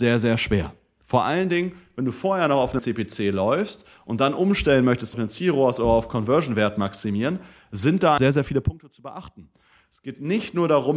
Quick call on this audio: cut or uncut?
cut